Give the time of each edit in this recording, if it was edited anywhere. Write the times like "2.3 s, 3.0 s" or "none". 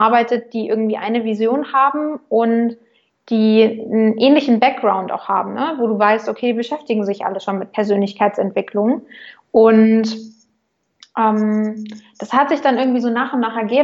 none